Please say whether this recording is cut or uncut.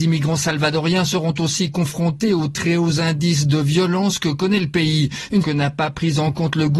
cut